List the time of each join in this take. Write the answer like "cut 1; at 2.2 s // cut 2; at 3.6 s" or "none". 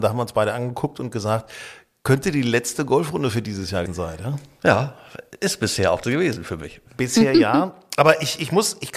cut 1; at 3.9 s // cut 2; at 6.0 s